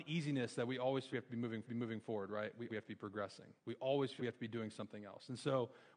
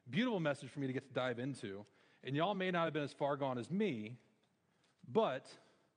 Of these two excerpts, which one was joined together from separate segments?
first; 5 cuts; at 1.1 s, 1.6 s, 2.7 s, 3.6 s, 4.2 s

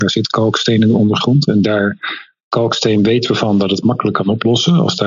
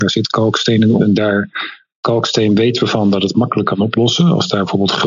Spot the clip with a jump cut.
second; 1 cut; at 1.0 s

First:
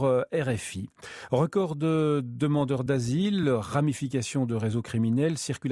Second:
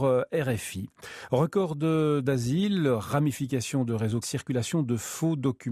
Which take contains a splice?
second; 2 cuts; at 2.2 s, 4.2 s

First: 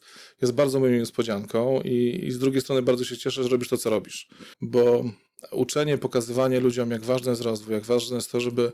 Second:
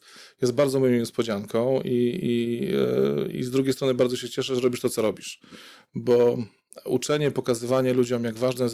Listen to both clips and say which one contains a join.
first; 2 cuts; at 2.2 s, 4.5 s

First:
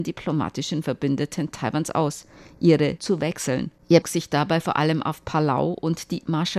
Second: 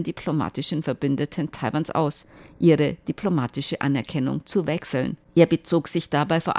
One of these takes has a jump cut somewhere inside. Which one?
first; 2 cuts; at 3.0 s, 4.0 s

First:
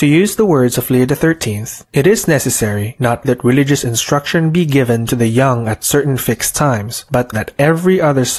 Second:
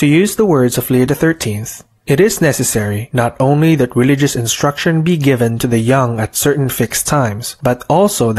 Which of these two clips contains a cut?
first; 3 cuts; at 1.8 s, 3.2 s, 7.3 s

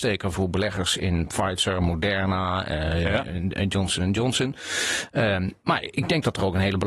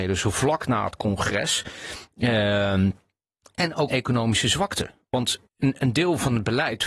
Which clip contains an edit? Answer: second; 2 cuts; at 3.9 s, 5.5 s

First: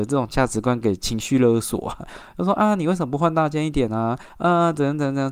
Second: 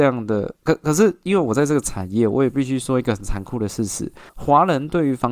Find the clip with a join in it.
second; 1 cut; at 4.3 s

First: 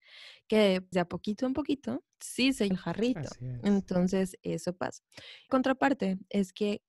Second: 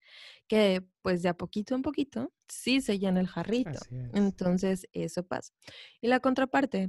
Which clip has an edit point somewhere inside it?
first; 3 cuts; at 0.9 s, 2.7 s, 5.5 s

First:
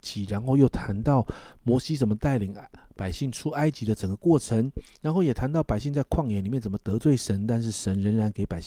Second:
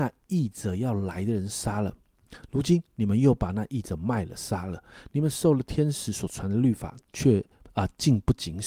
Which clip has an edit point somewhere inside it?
second; 1 cut; at 7.0 s

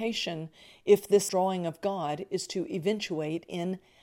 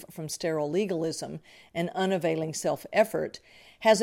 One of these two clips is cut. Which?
first; 1 cut; at 1.3 s

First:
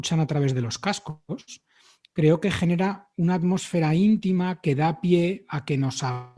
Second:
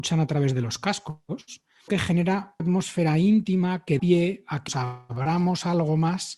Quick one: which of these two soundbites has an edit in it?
second; 4 cuts; at 1.9 s, 2.6 s, 4.0 s, 4.7 s

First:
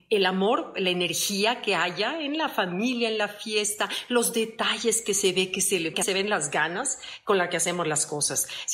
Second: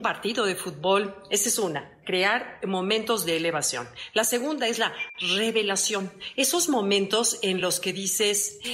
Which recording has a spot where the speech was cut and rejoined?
first; 1 cut; at 5.9 s

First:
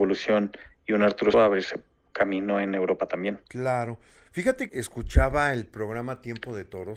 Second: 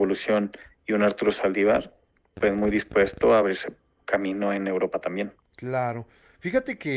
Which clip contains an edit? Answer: first; 3 cuts; at 1.3 s, 3.5 s, 4.7 s

